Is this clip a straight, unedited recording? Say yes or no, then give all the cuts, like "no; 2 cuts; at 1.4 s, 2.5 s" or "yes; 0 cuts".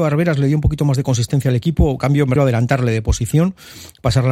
no; 1 cut; at 2.4 s